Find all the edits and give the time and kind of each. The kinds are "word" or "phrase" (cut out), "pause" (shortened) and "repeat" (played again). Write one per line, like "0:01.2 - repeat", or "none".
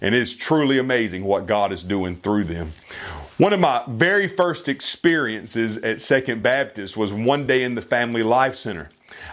none